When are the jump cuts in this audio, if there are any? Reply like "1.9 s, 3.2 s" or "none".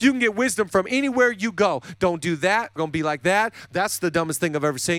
2.8 s